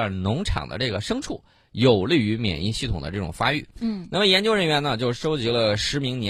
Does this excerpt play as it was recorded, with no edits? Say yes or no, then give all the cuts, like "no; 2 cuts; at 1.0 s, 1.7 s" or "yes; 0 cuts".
yes; 0 cuts